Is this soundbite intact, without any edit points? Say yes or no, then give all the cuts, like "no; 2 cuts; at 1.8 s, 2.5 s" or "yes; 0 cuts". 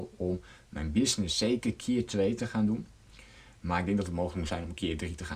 yes; 0 cuts